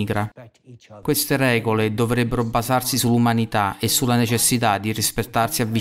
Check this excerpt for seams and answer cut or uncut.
uncut